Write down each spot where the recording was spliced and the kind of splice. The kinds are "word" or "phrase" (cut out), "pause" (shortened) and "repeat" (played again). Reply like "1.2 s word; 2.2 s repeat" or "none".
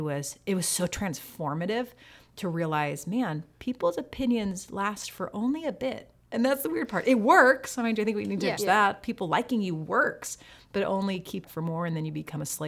8.6 s word; 11.4 s phrase